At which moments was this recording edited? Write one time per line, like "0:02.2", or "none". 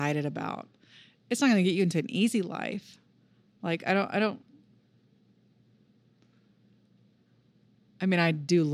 none